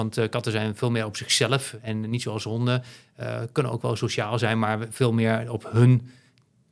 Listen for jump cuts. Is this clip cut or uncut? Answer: uncut